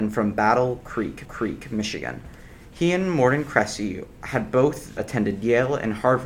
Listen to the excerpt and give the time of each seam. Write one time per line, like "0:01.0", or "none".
0:01.2
0:05.0

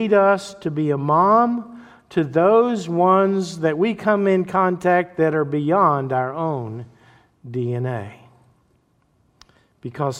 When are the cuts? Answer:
none

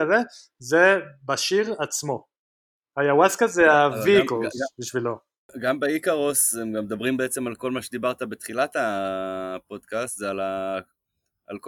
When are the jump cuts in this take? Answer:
none

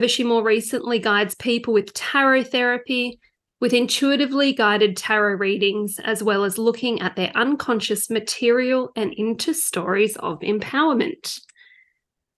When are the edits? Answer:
none

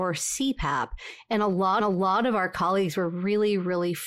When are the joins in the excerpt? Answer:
0:01.8

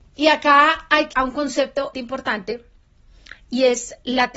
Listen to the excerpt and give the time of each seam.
0:01.1
0:01.9

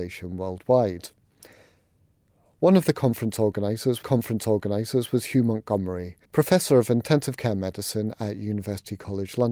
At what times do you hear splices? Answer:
0:04.0
0:06.2

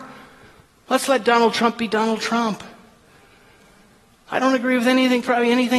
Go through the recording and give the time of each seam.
none

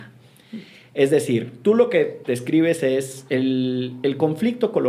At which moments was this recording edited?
none

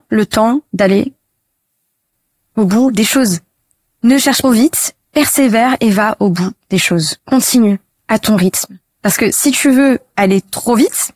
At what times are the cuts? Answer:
0:04.4
0:05.0
0:07.2

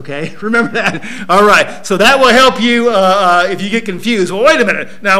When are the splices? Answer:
none

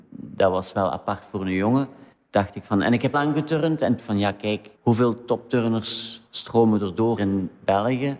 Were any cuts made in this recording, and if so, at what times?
0:02.1
0:03.1
0:04.0
0:04.7
0:06.3
0:07.2

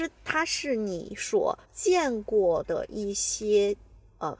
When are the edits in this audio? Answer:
0:01.6

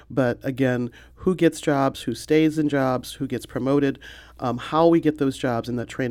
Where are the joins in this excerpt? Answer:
none

